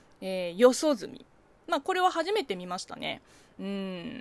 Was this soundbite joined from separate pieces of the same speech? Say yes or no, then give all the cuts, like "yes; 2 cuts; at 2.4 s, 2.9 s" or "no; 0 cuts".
no; 0 cuts